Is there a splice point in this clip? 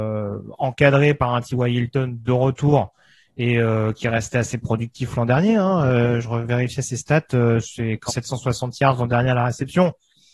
yes; 1 cut; at 8.1 s

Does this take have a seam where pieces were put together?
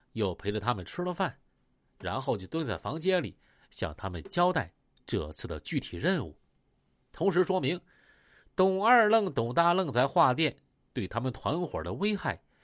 no; 0 cuts

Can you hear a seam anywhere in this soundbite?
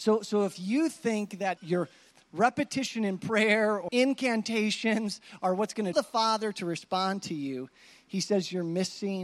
yes; 3 cuts; at 1.6 s, 3.9 s, 5.9 s

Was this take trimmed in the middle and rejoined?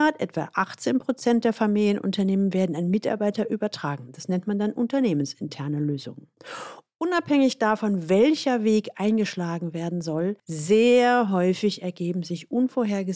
yes; 1 cut; at 10.4 s

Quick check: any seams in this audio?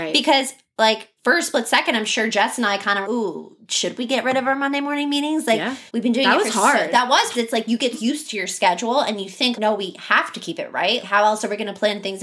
yes; 7 cuts; at 1.2 s, 3.0 s, 5.9 s, 7.3 s, 7.9 s, 9.5 s, 11.0 s

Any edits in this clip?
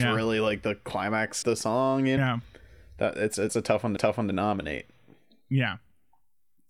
yes; 4 cuts; at 1.4 s, 2.2 s, 3.5 s, 4.0 s

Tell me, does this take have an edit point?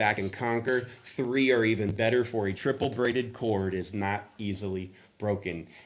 no; 0 cuts

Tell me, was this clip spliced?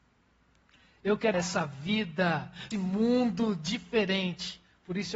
yes; 2 cuts; at 1.3 s, 2.7 s

